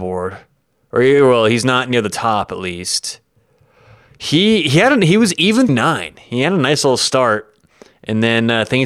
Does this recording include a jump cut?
yes; 1 cut; at 5.7 s

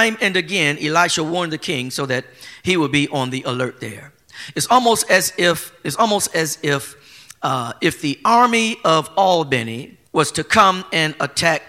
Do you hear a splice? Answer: yes; 1 cut; at 10.1 s

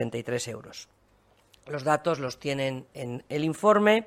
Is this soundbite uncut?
yes; 0 cuts

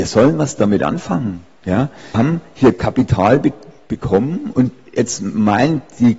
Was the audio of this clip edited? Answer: yes; 1 cut; at 2.1 s

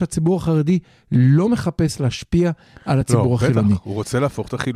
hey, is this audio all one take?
yes; 0 cuts

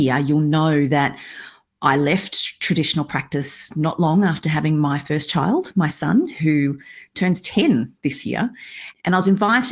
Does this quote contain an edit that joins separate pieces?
no; 0 cuts

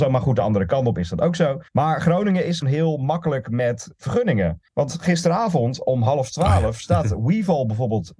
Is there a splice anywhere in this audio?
yes; 3 cuts; at 1.7 s, 2.6 s, 4.7 s

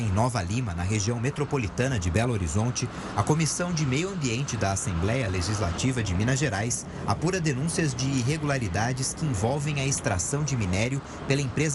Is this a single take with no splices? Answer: yes; 0 cuts

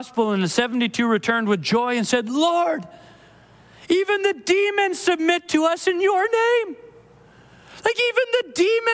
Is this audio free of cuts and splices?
yes; 0 cuts

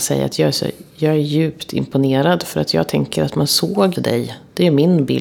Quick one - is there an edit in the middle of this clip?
yes; 1 cut; at 4.0 s

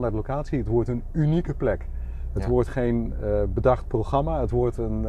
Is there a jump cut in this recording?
no; 0 cuts

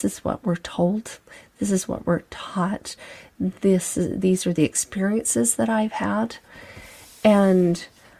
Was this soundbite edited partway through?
no; 0 cuts

